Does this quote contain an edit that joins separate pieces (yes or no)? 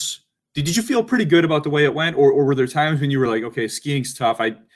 no